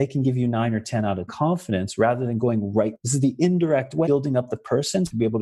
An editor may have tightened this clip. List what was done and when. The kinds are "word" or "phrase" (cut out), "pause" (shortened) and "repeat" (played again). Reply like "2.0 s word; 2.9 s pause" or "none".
1.3 s word; 4.1 s word